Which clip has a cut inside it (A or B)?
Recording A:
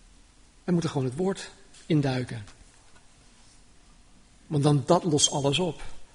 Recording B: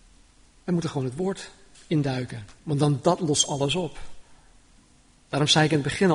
B